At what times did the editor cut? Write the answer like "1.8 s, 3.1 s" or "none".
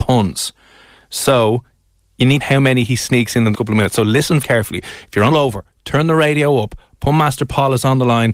2.4 s, 3.5 s, 4.4 s, 5.3 s

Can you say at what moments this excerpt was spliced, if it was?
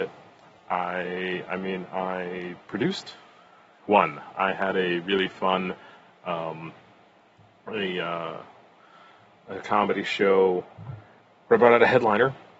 none

